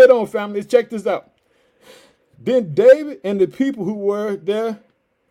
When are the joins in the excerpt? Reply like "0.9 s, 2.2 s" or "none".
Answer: none